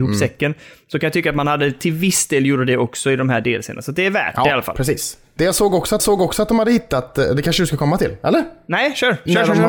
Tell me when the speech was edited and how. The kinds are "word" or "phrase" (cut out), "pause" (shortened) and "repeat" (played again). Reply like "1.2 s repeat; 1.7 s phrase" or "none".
6.0 s repeat